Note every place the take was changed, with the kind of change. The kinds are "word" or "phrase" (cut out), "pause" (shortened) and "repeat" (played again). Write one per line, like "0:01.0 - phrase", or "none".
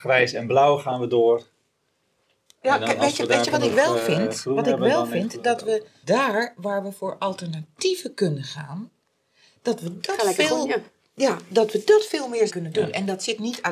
0:06.0 - word
0:12.5 - word